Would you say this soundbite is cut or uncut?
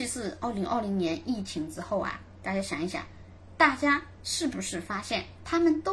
uncut